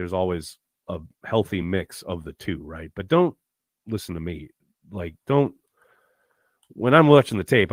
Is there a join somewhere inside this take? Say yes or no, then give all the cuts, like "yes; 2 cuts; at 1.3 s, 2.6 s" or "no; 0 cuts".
no; 0 cuts